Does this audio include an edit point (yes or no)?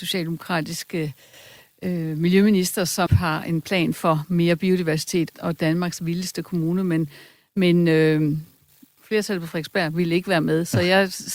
yes